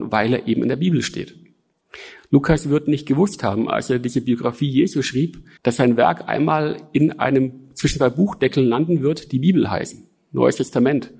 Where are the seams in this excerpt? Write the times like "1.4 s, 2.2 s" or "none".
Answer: 5.6 s